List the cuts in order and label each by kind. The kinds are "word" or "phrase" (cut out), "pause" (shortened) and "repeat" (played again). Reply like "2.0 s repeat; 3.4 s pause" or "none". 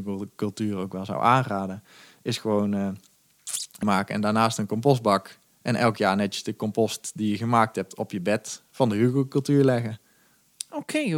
3.8 s word